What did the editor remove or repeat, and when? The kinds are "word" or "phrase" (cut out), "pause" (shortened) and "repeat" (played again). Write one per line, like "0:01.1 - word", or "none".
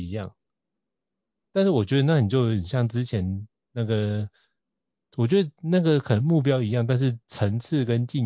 0:07.2 - pause